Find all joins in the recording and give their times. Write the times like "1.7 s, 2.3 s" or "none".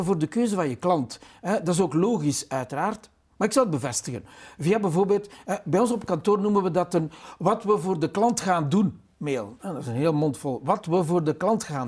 none